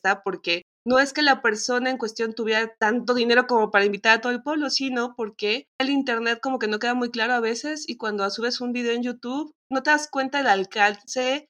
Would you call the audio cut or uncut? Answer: cut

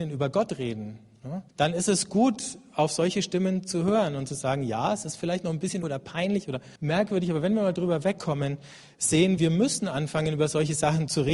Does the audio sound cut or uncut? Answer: cut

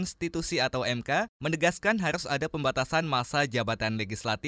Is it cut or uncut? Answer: uncut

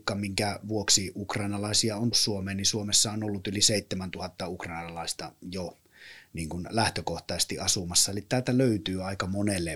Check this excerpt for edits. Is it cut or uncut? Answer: cut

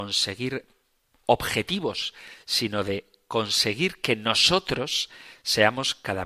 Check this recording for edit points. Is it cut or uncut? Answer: uncut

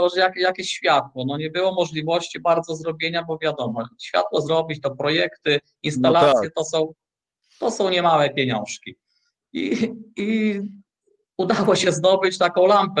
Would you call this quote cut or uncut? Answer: uncut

